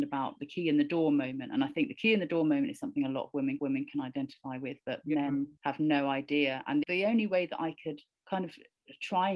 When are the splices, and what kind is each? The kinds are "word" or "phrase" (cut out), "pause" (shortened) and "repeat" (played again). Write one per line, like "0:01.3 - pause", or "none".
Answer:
0:03.6 - repeat
0:05.6 - pause
0:06.8 - word